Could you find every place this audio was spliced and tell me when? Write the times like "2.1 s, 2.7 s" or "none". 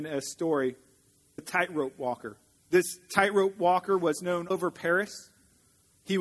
1.4 s, 2.6 s, 4.5 s